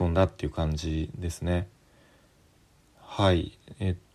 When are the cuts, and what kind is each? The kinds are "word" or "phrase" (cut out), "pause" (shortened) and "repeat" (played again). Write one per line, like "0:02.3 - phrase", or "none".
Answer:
none